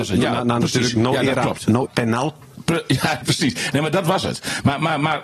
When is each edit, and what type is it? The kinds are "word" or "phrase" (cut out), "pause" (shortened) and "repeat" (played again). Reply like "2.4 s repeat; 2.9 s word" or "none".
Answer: 1.9 s word; 3.2 s word